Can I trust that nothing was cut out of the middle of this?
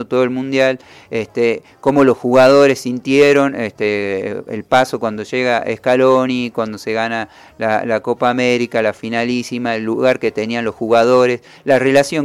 yes; 0 cuts

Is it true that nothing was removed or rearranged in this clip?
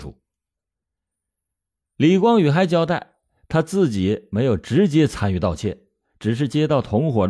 yes; 0 cuts

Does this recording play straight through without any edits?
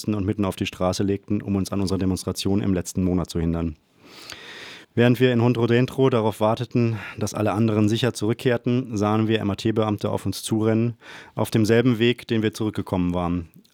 no; 1 cut; at 4.8 s

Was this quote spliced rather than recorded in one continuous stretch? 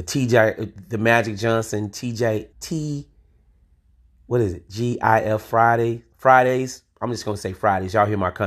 yes; 2 cuts; at 2.5 s, 6.1 s

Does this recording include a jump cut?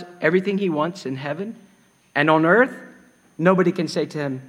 no; 0 cuts

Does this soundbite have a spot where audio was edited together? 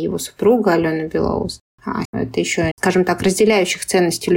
yes; 2 cuts; at 2.0 s, 2.7 s

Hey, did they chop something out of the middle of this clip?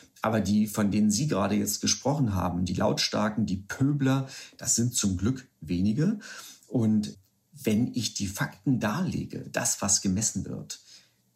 no; 0 cuts

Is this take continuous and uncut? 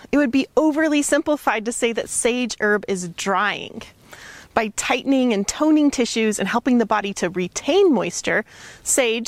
yes; 0 cuts

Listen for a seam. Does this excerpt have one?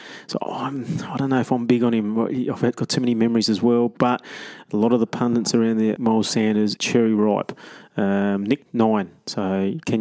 yes; 3 cuts; at 6.0 s, 6.8 s, 8.6 s

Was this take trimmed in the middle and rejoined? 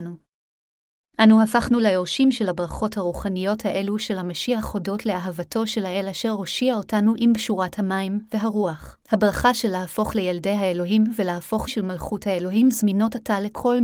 yes; 2 cuts; at 9.0 s, 11.7 s

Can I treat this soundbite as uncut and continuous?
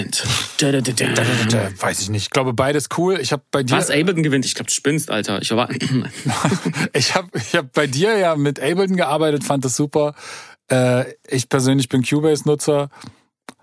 yes; 0 cuts

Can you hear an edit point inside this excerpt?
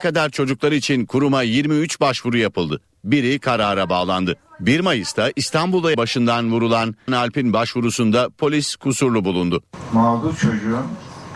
yes; 2 cuts; at 5.9 s, 7.1 s

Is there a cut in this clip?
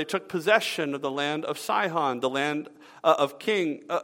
no; 0 cuts

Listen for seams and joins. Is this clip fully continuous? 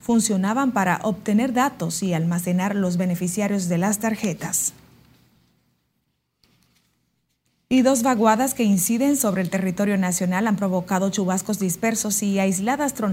yes; 0 cuts

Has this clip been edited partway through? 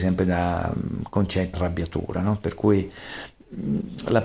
yes; 1 cut; at 1.5 s

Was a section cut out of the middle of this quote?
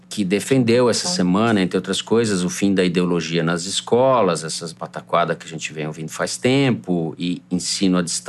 no; 0 cuts

